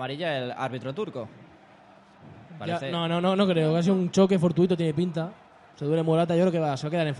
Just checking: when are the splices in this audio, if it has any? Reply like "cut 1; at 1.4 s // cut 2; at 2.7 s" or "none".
none